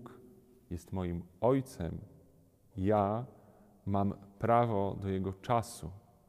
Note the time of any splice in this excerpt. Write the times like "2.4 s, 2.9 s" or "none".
2.7 s